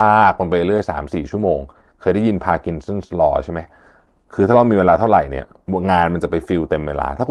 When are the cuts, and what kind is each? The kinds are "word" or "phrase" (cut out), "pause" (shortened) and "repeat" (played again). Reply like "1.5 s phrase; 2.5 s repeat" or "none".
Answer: none